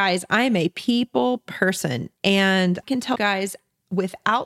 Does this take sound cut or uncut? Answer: cut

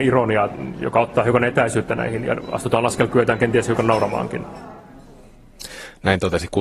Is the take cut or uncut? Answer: cut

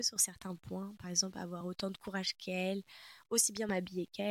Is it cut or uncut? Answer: uncut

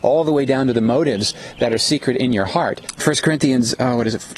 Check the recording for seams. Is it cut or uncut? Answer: uncut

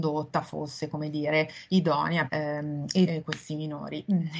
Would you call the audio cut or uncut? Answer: cut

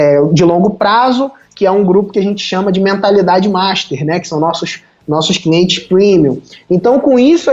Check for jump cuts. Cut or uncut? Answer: uncut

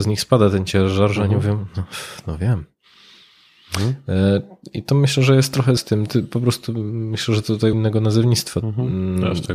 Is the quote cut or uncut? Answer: cut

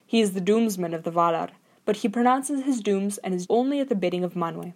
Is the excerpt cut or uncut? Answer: cut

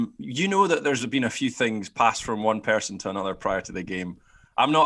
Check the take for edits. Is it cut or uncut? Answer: uncut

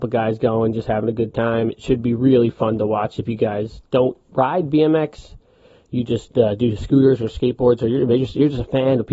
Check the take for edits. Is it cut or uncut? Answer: uncut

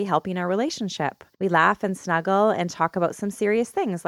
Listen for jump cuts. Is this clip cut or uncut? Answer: cut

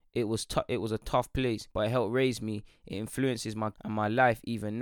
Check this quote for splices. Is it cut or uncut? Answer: cut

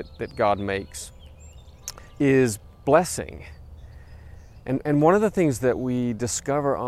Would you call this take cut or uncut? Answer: uncut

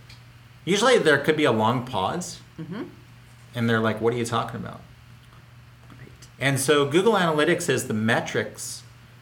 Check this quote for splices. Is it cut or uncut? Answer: uncut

